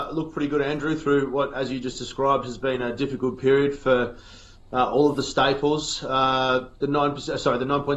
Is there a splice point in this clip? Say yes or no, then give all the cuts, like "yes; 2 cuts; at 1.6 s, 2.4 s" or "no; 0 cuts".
no; 0 cuts